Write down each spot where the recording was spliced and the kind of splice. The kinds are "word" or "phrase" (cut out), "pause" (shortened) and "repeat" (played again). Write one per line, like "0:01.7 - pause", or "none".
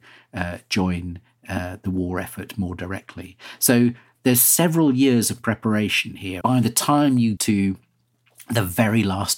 0:06.4 - word
0:07.4 - word